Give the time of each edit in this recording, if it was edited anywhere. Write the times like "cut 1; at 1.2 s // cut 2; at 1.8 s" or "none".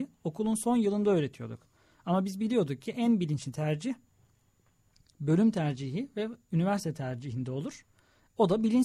none

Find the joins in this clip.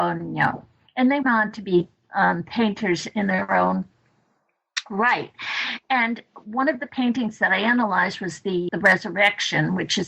cut 1; at 1.2 s // cut 2; at 8.7 s

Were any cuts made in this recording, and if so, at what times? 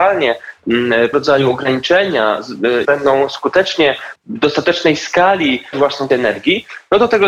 cut 1; at 1.1 s // cut 2; at 2.8 s // cut 3; at 4.2 s // cut 4; at 5.7 s // cut 5; at 6.1 s

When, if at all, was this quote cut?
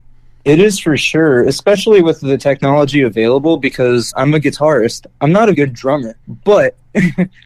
cut 1; at 4.1 s // cut 2; at 5.5 s // cut 3; at 6.2 s

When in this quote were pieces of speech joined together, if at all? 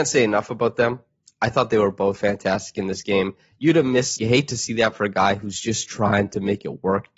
cut 1; at 2.1 s // cut 2; at 4.2 s

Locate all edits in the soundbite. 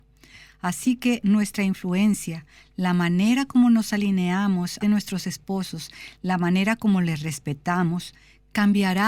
cut 1; at 4.8 s

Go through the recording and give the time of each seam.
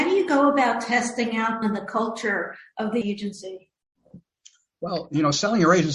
cut 1; at 1.6 s // cut 2; at 3.0 s

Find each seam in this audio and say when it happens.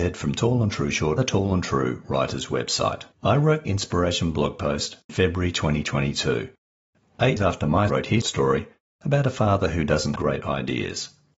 cut 1; at 1.2 s // cut 2; at 3.1 s // cut 3; at 3.7 s // cut 4; at 5.1 s // cut 5; at 7.4 s // cut 6; at 7.9 s // cut 7; at 8.2 s // cut 8; at 10.2 s

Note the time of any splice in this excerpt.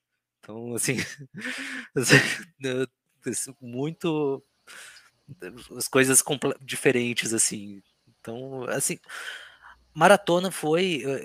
cut 1; at 6.6 s

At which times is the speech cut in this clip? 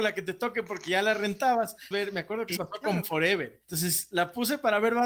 cut 1; at 1.9 s // cut 2; at 2.6 s // cut 3; at 3.0 s // cut 4; at 3.6 s

